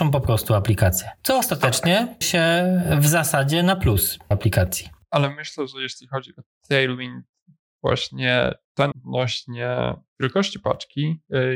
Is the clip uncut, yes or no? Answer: no